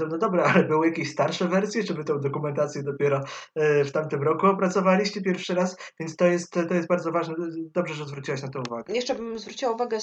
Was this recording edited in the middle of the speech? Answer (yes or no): no